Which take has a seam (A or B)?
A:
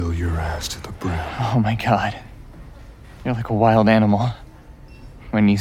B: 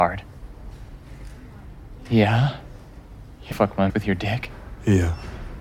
B